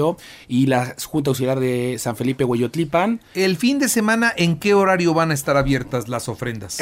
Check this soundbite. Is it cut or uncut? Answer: uncut